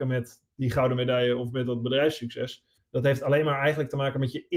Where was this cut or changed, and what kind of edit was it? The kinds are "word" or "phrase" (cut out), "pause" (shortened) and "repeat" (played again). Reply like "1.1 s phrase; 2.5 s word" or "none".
2.8 s pause